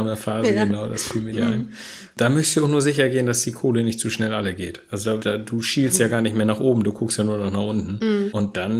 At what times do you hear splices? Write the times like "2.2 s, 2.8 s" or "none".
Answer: 1.3 s, 5.2 s